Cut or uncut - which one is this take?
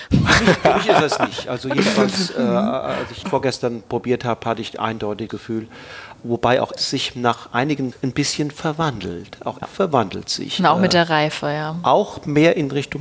cut